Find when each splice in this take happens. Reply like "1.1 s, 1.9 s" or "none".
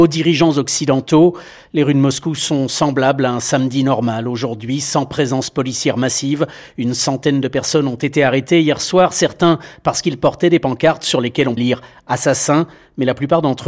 11.6 s